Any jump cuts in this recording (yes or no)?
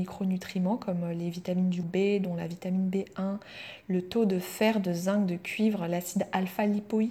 yes